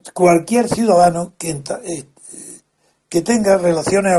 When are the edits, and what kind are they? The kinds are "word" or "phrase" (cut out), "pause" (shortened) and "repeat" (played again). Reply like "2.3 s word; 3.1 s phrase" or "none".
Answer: none